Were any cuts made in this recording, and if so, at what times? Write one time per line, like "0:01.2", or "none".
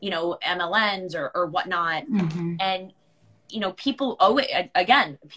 none

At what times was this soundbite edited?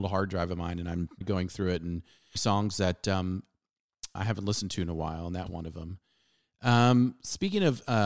0:01.2
0:02.3
0:04.2
0:05.5

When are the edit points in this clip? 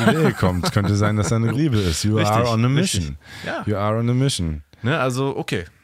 0:01.5

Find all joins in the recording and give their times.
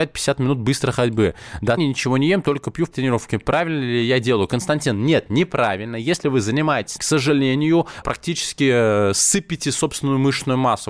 0:01.8
0:02.9
0:07.0
0:08.0

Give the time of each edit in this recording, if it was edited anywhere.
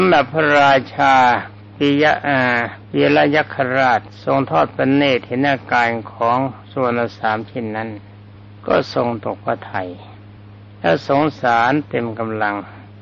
0:02.8
0:08.4
0:10.4

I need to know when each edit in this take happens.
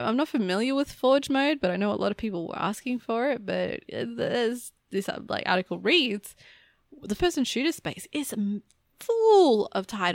0:07.2

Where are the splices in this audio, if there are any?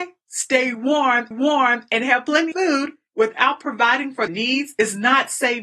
0:01.3
0:02.5
0:04.3

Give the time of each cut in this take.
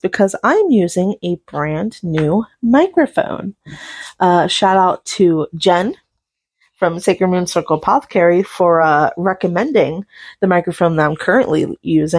none

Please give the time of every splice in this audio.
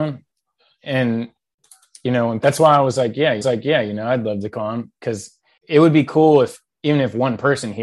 0:02.4
0:03.4
0:05.6

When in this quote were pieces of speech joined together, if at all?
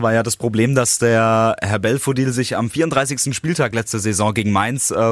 none

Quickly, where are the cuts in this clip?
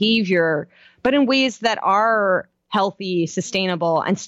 none

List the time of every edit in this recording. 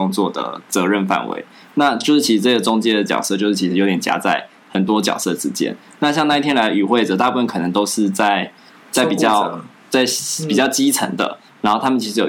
none

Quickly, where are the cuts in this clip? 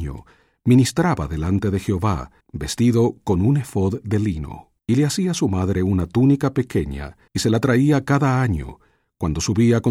0:02.4
0:04.8
0:07.3

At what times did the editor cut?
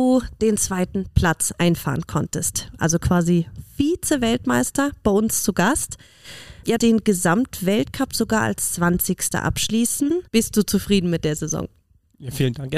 0:06.8
0:10.3

